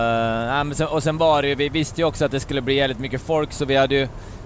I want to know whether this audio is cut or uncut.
uncut